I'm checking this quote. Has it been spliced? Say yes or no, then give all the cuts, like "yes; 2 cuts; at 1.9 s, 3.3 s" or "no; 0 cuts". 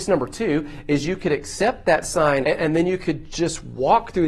yes; 1 cut; at 2.4 s